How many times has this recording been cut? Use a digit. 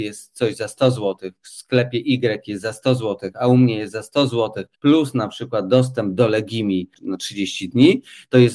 1